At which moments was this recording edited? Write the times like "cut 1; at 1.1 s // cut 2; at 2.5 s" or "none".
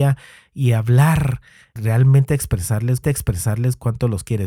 cut 1; at 1.8 s // cut 2; at 3.0 s